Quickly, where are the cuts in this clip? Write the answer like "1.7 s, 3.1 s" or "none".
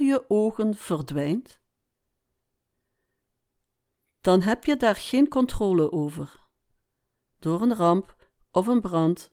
none